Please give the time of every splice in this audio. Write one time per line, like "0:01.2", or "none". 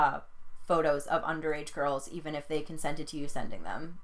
none